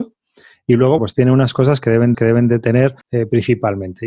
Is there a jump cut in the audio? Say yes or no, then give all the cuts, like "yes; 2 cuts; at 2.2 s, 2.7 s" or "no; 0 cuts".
yes; 4 cuts; at 1.0 s, 1.5 s, 2.1 s, 3.0 s